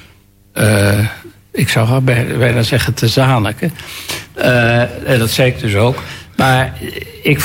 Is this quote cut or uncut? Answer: uncut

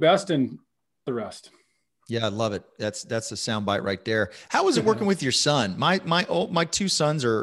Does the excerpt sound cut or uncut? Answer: cut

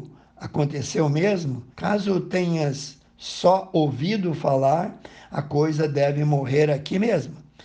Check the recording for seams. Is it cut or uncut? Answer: cut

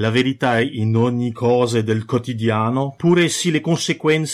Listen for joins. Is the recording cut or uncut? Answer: uncut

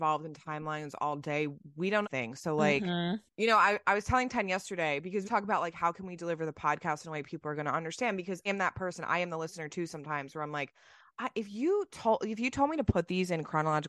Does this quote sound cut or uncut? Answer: cut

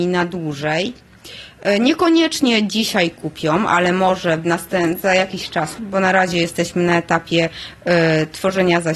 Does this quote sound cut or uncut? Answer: cut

